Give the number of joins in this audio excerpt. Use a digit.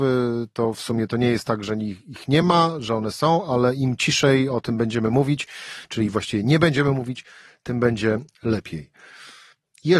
0